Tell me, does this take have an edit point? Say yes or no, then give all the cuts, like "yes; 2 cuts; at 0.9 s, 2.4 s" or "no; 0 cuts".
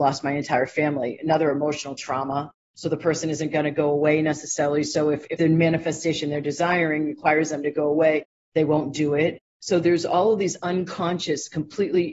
no; 0 cuts